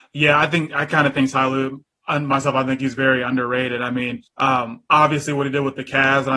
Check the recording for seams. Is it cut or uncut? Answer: cut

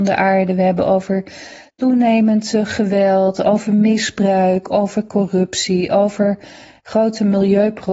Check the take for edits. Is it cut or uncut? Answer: uncut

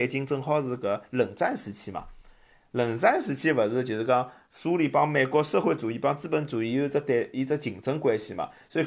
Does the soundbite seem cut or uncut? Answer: uncut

